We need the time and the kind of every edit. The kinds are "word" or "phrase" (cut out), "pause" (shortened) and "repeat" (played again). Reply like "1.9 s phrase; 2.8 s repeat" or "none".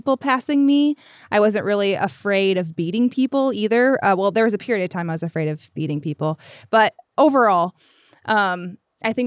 none